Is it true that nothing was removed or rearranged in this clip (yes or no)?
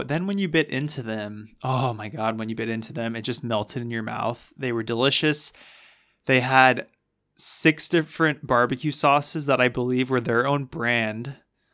yes